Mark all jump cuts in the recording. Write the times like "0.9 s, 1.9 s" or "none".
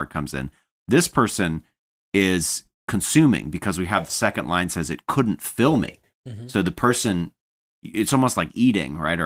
none